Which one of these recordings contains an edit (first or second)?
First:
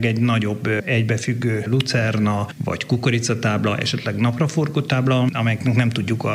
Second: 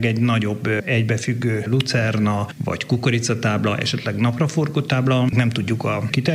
second